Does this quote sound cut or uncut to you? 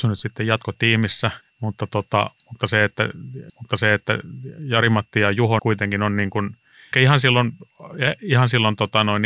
cut